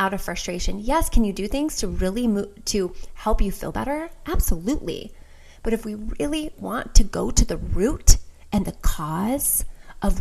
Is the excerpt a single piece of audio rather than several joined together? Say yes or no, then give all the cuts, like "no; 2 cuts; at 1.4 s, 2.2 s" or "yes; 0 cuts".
no; 1 cut; at 6.5 s